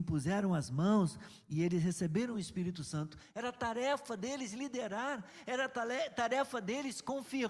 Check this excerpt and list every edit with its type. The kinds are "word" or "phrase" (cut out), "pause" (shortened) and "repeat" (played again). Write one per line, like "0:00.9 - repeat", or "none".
none